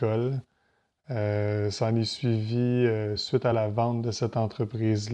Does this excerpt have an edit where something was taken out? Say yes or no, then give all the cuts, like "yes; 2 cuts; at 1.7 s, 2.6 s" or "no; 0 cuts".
no; 0 cuts